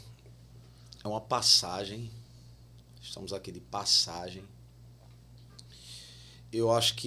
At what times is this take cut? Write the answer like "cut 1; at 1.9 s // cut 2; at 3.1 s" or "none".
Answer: none